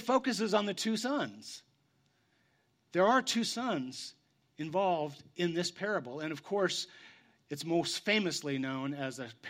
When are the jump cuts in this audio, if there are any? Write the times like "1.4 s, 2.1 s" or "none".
none

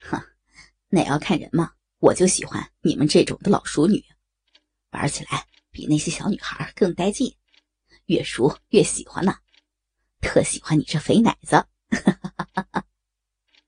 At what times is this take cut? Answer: 1.8 s

